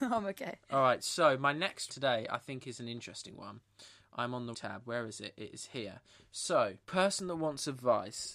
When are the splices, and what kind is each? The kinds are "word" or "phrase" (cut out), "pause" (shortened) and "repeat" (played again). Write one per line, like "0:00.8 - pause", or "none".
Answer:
0:01.9 - word
0:04.5 - word
0:06.8 - word